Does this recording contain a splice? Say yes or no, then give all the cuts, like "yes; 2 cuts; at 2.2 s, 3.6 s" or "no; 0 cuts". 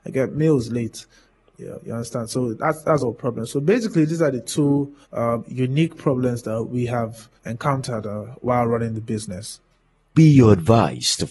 yes; 4 cuts; at 3.0 s, 5.0 s, 7.4 s, 10.1 s